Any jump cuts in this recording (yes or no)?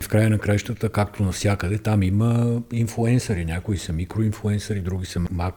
no